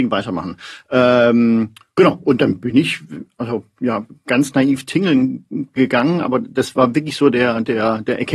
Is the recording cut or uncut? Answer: uncut